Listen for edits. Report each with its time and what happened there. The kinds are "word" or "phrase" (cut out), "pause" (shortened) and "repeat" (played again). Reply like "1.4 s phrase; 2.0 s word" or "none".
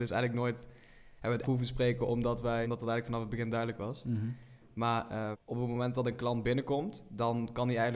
1.4 s phrase; 2.6 s word; 5.3 s word